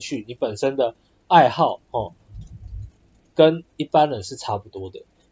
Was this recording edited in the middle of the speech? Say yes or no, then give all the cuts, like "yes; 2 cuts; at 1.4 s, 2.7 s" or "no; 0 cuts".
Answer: no; 0 cuts